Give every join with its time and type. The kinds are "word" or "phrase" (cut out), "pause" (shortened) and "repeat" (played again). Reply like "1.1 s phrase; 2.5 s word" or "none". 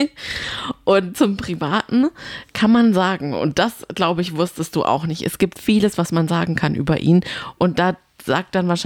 none